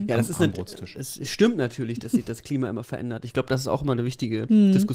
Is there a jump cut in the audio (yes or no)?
no